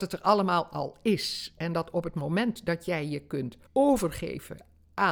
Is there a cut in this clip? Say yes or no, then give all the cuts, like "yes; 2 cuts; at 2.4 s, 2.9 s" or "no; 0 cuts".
yes; 1 cut; at 3.7 s